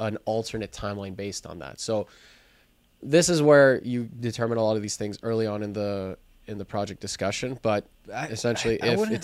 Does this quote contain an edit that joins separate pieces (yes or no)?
no